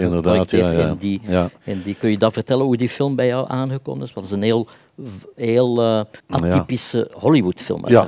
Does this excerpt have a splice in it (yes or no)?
yes